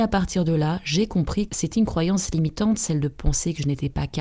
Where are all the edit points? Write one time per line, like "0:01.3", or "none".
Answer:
0:01.5